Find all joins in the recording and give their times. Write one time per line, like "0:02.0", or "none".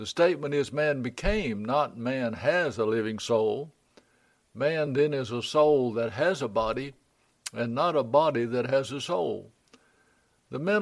none

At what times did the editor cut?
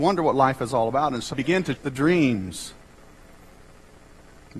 0:01.3
0:01.7

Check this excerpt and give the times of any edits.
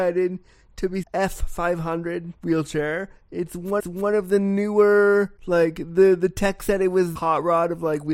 0:01.0
0:02.4
0:03.8
0:05.4
0:07.2

